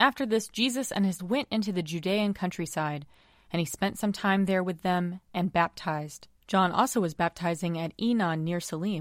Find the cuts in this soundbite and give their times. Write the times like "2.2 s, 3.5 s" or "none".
1.2 s, 6.4 s